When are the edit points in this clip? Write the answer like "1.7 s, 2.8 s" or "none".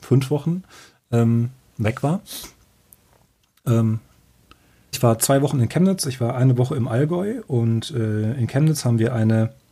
4.9 s